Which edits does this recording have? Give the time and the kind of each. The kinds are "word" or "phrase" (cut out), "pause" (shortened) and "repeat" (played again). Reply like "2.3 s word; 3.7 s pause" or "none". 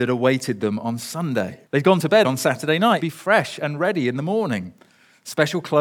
1.7 s pause; 2.2 s word; 3.0 s phrase